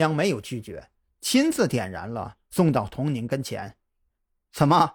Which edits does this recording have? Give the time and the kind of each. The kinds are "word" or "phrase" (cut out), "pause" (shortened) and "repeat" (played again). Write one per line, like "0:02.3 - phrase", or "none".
none